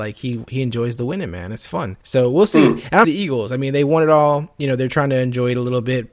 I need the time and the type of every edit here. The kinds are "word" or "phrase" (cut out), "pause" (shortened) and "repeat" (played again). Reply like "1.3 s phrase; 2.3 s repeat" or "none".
2.0 s pause; 3.0 s phrase